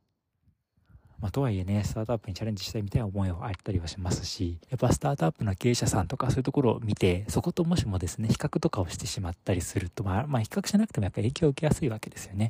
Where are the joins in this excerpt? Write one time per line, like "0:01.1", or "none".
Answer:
0:04.6
0:09.4